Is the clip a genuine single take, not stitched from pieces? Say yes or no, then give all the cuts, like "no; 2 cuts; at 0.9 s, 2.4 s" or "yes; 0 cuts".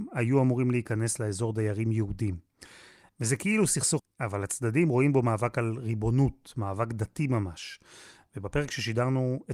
no; 1 cut; at 4.0 s